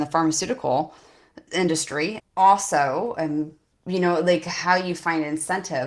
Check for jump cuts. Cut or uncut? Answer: cut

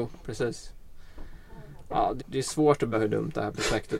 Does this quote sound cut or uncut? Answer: cut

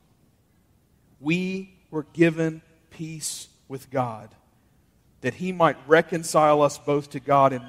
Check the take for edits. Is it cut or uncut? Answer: uncut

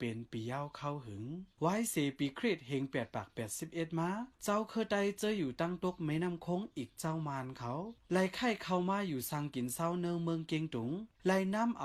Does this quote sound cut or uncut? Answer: uncut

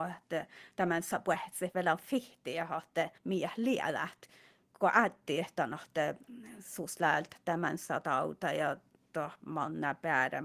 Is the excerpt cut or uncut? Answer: cut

